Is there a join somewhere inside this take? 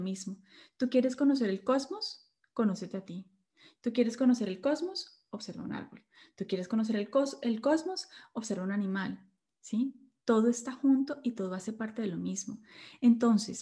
no; 0 cuts

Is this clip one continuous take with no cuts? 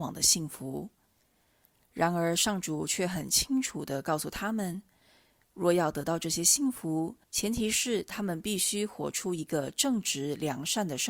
no; 1 cut; at 7.2 s

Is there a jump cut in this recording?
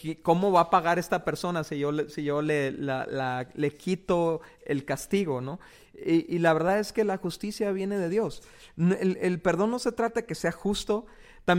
no; 0 cuts

